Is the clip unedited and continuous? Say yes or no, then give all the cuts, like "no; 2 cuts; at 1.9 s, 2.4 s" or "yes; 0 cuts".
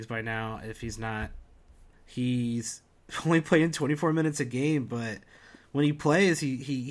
no; 1 cut; at 1.9 s